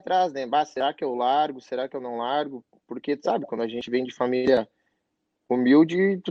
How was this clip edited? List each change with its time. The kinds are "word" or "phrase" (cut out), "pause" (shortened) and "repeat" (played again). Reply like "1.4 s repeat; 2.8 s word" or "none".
none